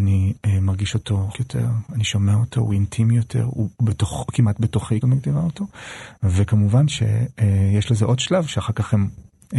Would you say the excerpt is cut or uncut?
cut